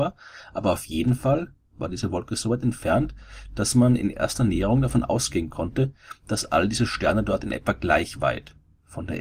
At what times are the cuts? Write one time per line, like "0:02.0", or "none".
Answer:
none